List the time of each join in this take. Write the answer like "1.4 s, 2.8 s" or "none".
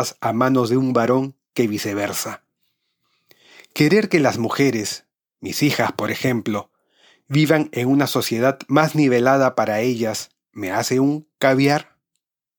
none